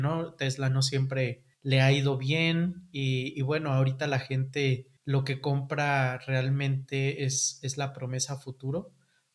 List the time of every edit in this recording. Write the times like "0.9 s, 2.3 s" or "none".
1.5 s, 5.0 s